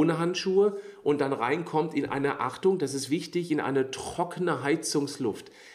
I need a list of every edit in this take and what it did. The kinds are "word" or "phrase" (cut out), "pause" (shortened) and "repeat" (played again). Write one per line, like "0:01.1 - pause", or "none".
none